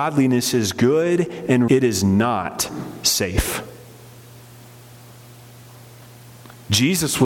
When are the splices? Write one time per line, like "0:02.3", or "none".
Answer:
0:01.7